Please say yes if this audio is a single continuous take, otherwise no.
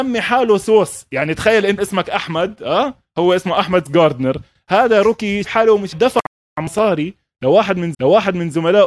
no